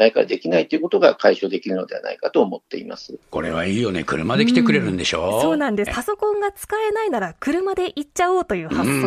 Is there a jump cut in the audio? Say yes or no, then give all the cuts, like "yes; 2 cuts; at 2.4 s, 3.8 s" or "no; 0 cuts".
yes; 2 cuts; at 3.2 s, 5.9 s